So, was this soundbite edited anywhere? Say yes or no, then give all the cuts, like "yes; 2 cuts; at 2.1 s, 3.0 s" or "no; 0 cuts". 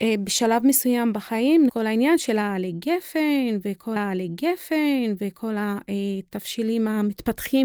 yes; 2 cuts; at 1.7 s, 4.0 s